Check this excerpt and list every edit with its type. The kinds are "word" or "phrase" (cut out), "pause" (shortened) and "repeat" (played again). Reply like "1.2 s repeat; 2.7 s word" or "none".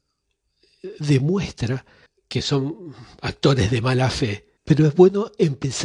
2.1 s pause; 4.6 s pause